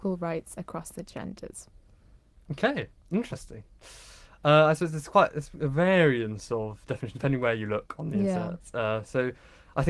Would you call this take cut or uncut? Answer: uncut